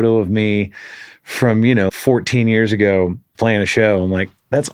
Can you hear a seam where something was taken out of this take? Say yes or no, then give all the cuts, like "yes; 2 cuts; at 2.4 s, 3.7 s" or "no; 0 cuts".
yes; 2 cuts; at 1.9 s, 3.3 s